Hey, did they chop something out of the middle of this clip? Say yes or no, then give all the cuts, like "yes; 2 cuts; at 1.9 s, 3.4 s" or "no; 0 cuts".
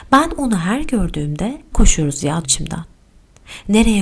yes; 2 cuts; at 1.7 s, 2.4 s